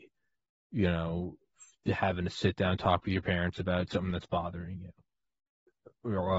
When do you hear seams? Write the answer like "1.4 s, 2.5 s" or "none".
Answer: none